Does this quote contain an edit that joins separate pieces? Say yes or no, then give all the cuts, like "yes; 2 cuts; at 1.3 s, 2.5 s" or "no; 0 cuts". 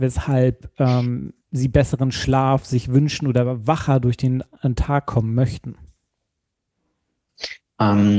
yes; 1 cut; at 1.4 s